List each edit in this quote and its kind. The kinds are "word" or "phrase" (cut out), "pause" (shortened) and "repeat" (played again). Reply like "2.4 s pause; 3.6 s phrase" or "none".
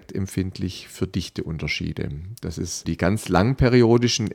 2.8 s word